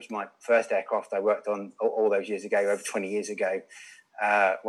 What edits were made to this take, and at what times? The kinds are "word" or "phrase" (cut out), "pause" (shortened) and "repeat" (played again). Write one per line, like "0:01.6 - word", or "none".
none